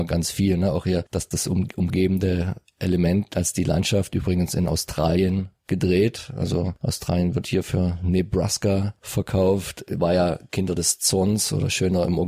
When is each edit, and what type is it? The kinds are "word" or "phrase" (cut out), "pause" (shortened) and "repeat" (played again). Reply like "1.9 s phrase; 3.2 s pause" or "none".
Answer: 1.3 s phrase